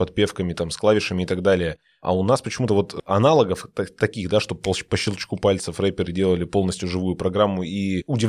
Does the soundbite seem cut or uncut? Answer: uncut